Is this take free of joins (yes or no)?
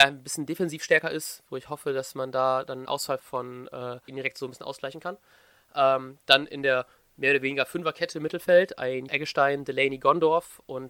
no